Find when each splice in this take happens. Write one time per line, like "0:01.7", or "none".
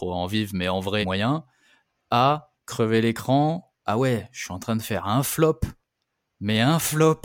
0:01.0
0:02.6
0:03.8